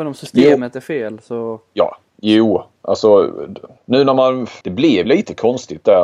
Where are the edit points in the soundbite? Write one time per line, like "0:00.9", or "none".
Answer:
0:03.8
0:04.6
0:05.0